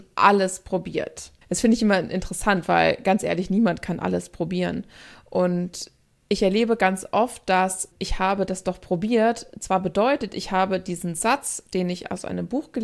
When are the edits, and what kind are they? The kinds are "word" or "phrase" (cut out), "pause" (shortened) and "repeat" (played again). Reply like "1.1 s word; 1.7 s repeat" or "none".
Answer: 1.4 s pause; 6.1 s pause; 7.9 s word